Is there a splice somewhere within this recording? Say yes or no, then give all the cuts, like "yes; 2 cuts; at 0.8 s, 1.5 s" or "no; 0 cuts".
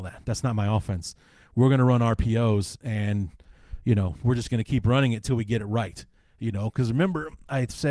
no; 0 cuts